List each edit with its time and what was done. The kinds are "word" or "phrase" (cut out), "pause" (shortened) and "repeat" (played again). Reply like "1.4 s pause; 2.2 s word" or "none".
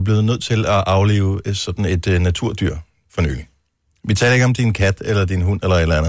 none